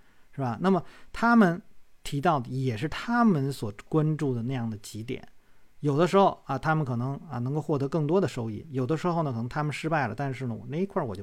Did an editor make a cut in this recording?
yes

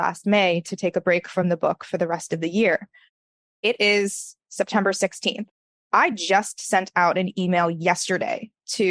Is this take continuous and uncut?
yes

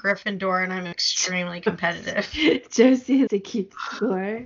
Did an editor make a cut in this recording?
yes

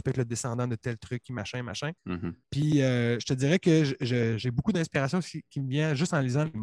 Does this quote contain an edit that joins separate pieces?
yes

